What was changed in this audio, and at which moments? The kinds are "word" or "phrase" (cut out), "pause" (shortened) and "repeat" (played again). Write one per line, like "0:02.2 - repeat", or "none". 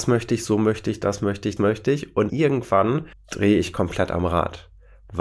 0:01.6 - word
0:02.3 - word
0:03.1 - pause